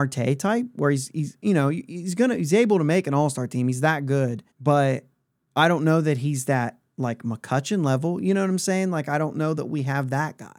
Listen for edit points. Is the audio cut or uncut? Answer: cut